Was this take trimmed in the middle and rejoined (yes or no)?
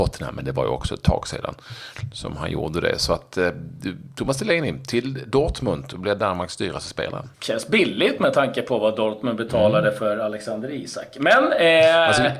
yes